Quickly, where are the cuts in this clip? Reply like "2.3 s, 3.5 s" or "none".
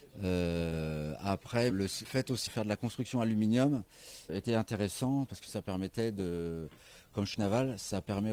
1.7 s, 2.0 s, 2.5 s, 4.3 s, 7.3 s